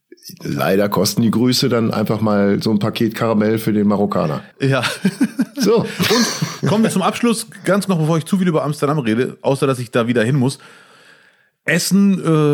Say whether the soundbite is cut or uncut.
cut